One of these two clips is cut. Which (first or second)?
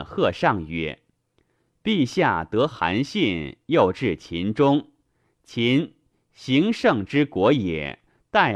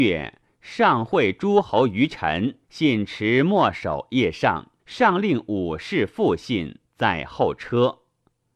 second